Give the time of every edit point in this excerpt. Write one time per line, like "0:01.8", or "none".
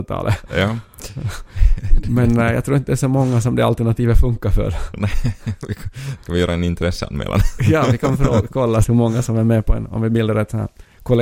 0:08.8